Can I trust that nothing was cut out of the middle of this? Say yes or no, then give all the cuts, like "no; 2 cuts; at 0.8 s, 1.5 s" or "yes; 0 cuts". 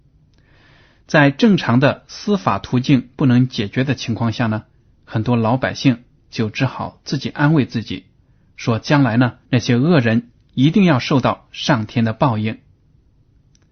no; 1 cut; at 9.5 s